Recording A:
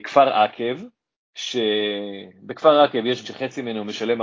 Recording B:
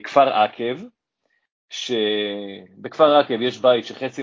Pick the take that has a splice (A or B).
A